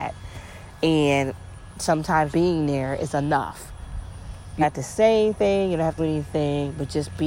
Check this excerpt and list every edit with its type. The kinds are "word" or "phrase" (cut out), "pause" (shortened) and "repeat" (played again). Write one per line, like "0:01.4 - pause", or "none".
0:02.3 - word
0:04.6 - word
0:06.0 - word